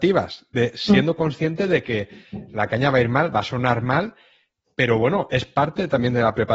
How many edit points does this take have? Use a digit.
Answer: 0